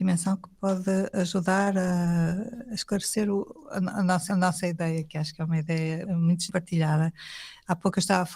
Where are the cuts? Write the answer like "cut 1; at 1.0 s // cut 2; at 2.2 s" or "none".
cut 1; at 4.3 s // cut 2; at 6.0 s // cut 3; at 6.5 s